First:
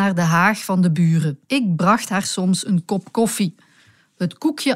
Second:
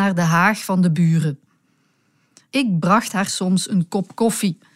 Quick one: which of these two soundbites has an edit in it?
first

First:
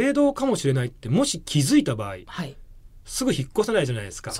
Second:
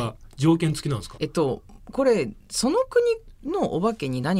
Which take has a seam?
second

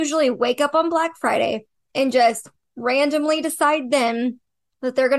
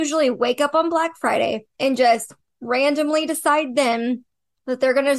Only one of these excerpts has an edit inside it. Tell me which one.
second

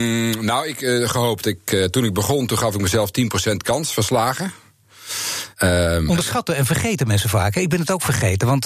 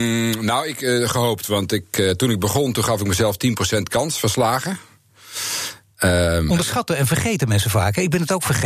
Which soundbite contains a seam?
first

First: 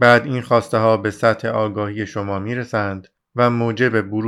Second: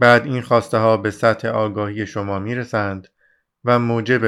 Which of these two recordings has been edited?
first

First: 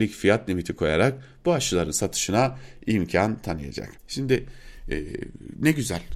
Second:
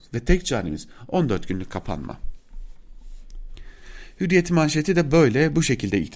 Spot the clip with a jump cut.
first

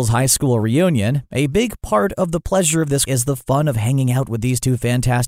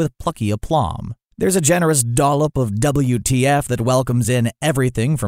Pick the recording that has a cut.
first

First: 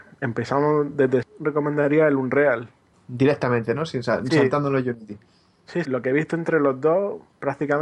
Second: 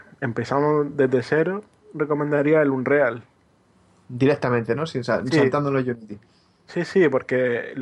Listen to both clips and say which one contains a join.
first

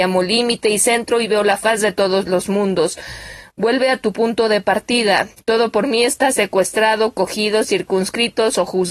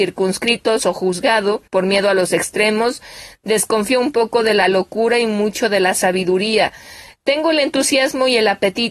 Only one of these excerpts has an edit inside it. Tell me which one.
second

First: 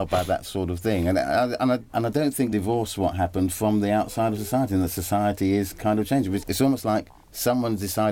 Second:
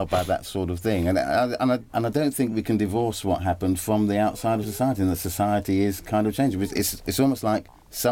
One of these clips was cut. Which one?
first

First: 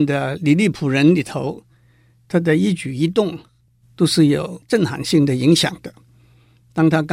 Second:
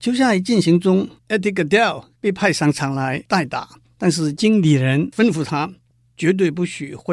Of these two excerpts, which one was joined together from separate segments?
second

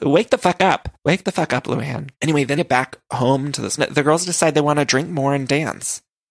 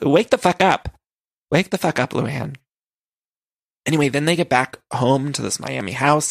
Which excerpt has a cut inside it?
first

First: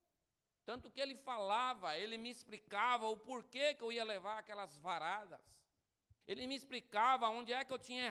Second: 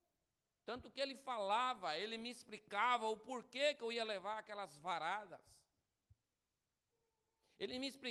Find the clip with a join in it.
first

